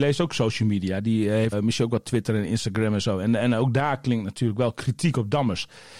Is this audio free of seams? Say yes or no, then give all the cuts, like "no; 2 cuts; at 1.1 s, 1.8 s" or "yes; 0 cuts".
no; 1 cut; at 1.5 s